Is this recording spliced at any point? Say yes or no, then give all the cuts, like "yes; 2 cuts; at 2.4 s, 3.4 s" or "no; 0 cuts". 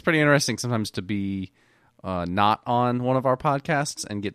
no; 0 cuts